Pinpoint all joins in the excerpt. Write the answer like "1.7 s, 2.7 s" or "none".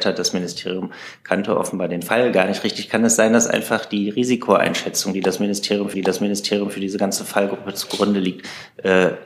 5.9 s